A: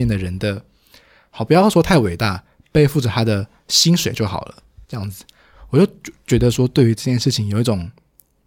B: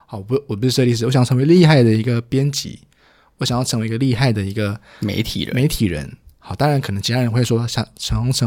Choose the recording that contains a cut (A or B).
A